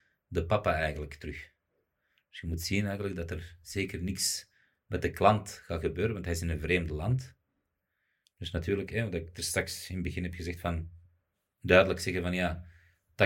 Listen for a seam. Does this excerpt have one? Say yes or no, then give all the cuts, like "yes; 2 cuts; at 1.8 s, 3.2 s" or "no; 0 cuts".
no; 0 cuts